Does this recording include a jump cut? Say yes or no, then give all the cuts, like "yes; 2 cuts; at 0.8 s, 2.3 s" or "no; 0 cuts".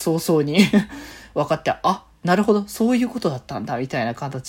no; 0 cuts